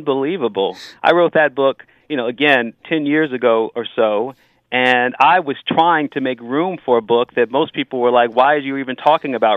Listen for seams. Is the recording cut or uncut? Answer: uncut